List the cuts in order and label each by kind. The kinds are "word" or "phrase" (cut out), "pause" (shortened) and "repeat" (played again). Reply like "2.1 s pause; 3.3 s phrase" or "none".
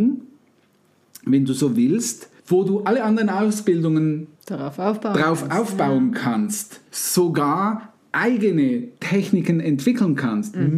2.4 s pause; 4.3 s pause; 6.9 s pause